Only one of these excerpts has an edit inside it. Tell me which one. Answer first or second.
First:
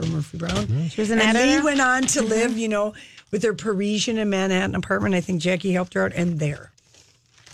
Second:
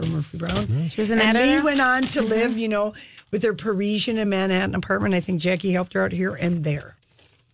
first